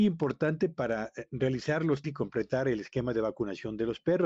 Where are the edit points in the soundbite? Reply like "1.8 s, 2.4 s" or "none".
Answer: 2.0 s